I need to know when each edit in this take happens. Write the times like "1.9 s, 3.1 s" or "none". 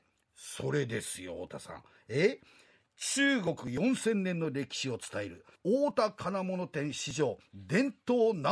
5.5 s